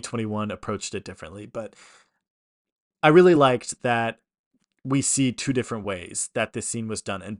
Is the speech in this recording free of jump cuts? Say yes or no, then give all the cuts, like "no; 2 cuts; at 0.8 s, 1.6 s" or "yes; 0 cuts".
yes; 0 cuts